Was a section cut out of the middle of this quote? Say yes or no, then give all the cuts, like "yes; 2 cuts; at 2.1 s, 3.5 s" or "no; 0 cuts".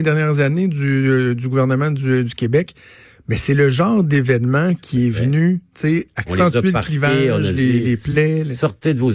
no; 0 cuts